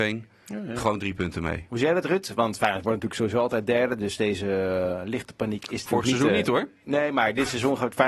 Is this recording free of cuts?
yes; 0 cuts

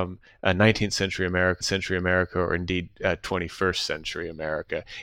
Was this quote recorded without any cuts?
no; 1 cut; at 1.6 s

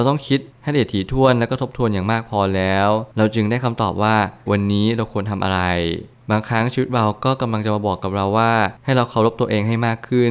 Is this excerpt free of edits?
no; 2 cuts; at 3.1 s, 4.5 s

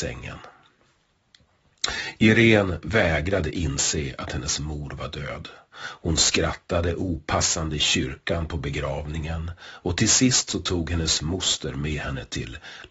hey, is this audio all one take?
yes; 0 cuts

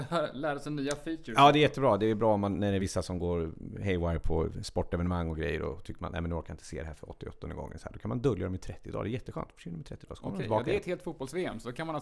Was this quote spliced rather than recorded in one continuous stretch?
no; 0 cuts

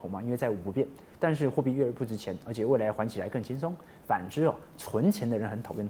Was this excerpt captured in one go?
yes; 0 cuts

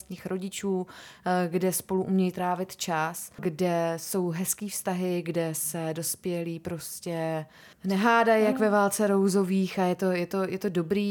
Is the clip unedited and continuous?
yes; 0 cuts

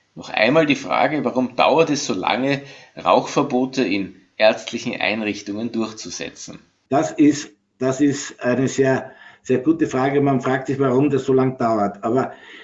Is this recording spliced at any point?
no; 0 cuts

